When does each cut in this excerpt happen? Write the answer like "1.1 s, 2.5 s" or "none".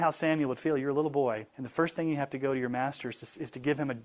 1.5 s